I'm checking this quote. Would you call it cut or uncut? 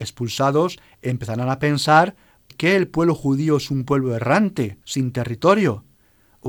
cut